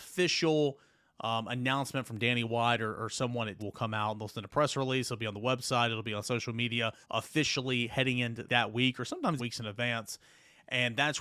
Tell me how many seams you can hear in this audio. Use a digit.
4